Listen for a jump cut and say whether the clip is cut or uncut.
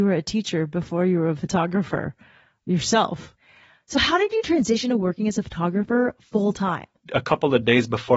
uncut